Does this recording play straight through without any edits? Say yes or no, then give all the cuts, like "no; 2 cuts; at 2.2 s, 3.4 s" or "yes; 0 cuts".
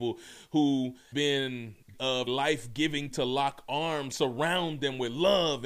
no; 5 cuts; at 1.1 s, 1.9 s, 2.3 s, 3.1 s, 4.1 s